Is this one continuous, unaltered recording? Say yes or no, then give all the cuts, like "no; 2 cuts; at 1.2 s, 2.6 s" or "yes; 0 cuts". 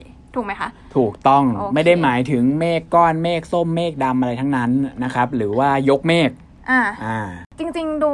yes; 0 cuts